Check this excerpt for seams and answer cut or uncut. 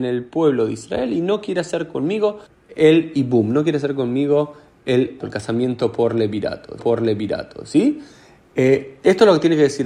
cut